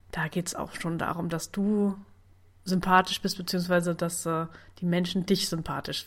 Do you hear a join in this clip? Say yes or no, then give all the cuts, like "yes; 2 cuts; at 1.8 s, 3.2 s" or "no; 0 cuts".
no; 0 cuts